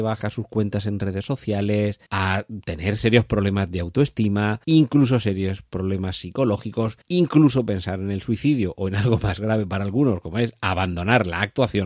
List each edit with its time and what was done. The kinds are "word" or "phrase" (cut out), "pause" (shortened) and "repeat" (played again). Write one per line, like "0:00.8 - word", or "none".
0:02.1 - pause
0:04.6 - pause
0:07.0 - pause